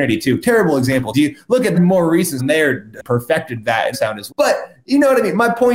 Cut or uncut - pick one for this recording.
cut